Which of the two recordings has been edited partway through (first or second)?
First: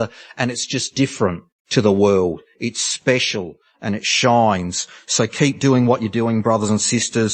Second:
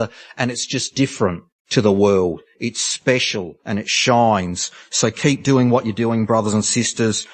second